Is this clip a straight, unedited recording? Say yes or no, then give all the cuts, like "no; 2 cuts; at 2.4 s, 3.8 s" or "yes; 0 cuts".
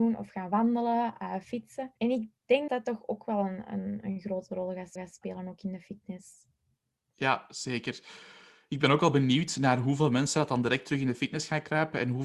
no; 3 cuts; at 2.0 s, 2.7 s, 5.0 s